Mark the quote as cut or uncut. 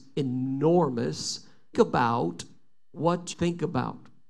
cut